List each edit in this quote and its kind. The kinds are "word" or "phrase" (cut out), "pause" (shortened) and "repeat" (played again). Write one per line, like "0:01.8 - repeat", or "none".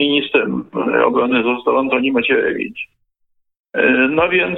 none